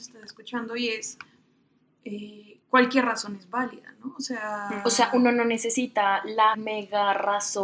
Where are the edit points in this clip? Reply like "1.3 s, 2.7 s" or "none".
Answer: 2.6 s, 6.5 s